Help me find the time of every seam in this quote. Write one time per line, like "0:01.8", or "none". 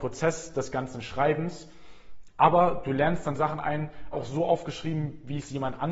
0:04.1